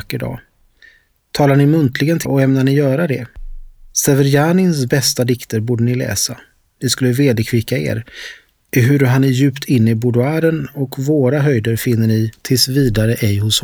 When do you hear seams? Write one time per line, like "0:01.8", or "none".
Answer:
0:02.3